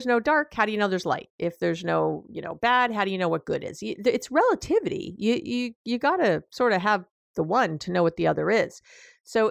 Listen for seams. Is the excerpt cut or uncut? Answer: uncut